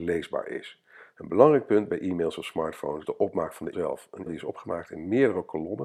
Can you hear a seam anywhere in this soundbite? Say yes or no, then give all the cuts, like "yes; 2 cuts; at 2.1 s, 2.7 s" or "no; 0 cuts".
yes; 3 cuts; at 3.0 s, 3.7 s, 4.3 s